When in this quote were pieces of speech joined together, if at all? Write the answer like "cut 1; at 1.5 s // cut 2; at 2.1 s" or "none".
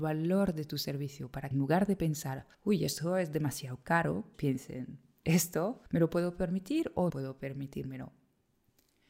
cut 1; at 1.5 s // cut 2; at 2.5 s // cut 3; at 4.3 s // cut 4; at 5.9 s // cut 5; at 7.1 s